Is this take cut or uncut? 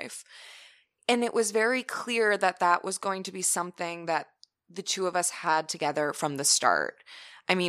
uncut